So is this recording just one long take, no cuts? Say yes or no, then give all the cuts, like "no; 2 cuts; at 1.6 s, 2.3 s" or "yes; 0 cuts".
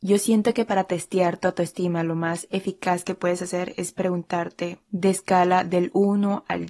yes; 0 cuts